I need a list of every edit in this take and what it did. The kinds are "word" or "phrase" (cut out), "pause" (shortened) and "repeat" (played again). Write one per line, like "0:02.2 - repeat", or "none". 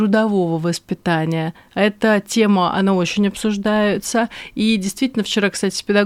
none